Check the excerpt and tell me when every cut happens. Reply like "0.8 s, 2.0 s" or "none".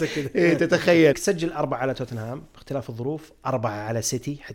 1.1 s